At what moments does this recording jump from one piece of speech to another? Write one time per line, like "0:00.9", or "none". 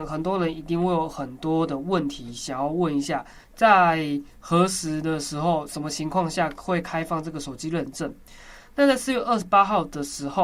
0:03.4